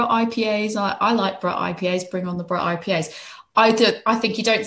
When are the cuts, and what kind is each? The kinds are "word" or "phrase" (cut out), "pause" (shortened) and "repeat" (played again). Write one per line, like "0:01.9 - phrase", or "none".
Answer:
none